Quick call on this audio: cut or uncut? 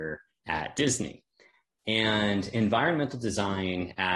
uncut